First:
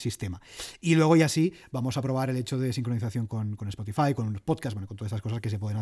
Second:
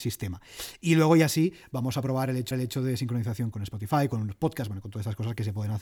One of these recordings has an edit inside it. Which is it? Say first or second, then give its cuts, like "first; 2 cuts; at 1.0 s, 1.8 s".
second; 2 cuts; at 2.5 s, 3.5 s